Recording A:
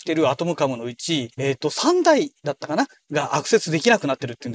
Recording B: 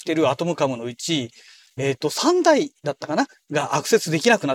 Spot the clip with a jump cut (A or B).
A